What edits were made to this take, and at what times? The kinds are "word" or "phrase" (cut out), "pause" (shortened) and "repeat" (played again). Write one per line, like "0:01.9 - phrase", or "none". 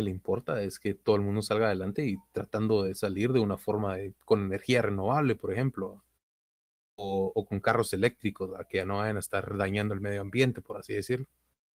none